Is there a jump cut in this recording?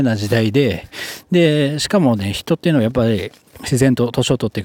no; 0 cuts

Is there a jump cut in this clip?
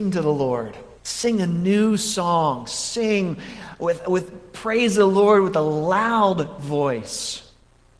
yes; 1 cut; at 1.0 s

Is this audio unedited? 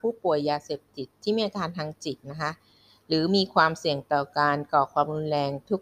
yes; 0 cuts

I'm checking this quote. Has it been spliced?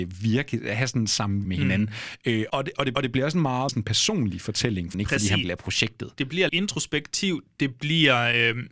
yes; 7 cuts; at 1.4 s, 2.5 s, 2.9 s, 3.7 s, 4.9 s, 5.4 s, 6.5 s

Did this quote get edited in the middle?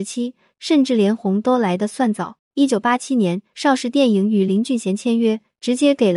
yes; 1 cut; at 2.4 s

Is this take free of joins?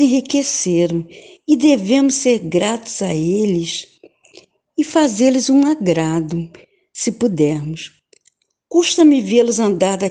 yes; 0 cuts

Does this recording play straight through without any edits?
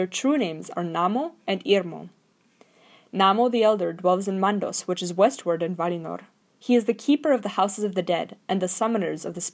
yes; 0 cuts

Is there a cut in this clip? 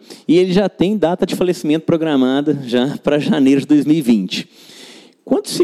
no; 0 cuts

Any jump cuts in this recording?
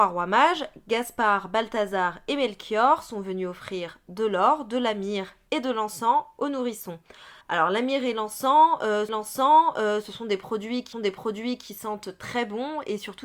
yes; 3 cuts; at 7.4 s, 9.1 s, 10.9 s

